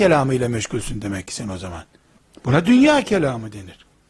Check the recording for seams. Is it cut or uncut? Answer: cut